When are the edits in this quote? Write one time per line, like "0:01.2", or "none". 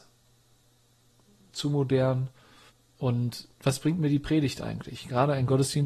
0:02.7